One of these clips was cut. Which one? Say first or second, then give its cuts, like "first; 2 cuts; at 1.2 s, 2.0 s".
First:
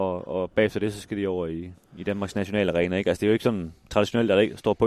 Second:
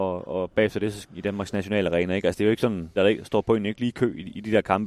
second; 2 cuts; at 1.0 s, 3.0 s